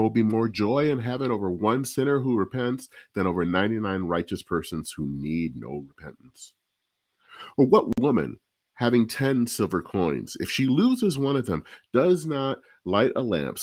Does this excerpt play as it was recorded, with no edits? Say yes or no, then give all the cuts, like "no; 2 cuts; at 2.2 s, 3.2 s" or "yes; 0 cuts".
yes; 0 cuts